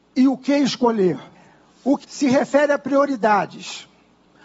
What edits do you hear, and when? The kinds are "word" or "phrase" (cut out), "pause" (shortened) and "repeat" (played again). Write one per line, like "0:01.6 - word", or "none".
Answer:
0:01.3 - pause
0:02.0 - word